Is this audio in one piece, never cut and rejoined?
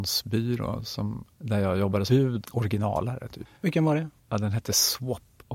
no; 5 cuts; at 1.3 s, 2.1 s, 2.4 s, 3.6 s, 4.2 s

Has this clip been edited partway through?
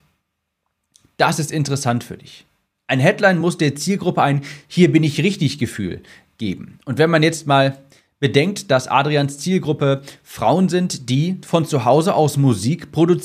no; 0 cuts

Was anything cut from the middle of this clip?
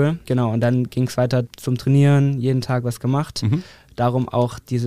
no; 0 cuts

